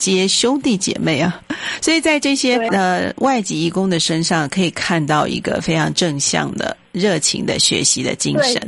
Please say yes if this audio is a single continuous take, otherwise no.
no